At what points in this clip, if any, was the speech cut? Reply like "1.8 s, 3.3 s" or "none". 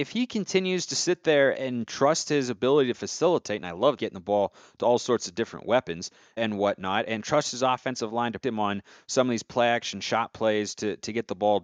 1.5 s, 4.0 s, 6.4 s, 8.4 s